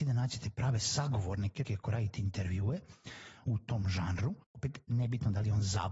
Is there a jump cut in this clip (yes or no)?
yes